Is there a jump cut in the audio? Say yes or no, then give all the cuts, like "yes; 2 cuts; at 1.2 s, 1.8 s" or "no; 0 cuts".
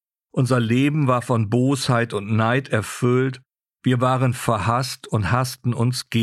no; 0 cuts